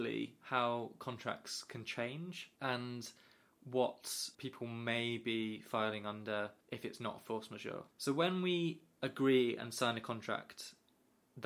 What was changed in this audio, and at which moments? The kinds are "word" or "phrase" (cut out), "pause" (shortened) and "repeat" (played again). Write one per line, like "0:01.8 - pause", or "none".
0:02.6 - pause
0:04.3 - pause
0:06.6 - pause
0:07.9 - pause